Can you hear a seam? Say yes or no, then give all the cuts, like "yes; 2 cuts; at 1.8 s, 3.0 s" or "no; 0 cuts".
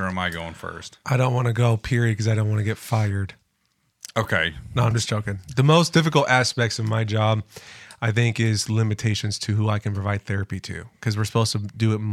no; 0 cuts